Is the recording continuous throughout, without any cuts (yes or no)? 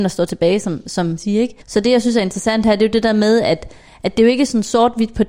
no